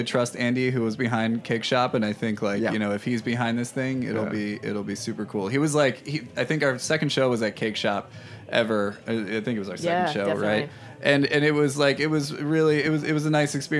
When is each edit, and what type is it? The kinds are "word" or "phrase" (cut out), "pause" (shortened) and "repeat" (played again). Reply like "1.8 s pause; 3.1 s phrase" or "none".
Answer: none